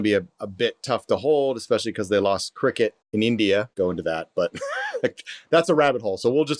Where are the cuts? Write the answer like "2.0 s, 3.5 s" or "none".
3.0 s, 3.7 s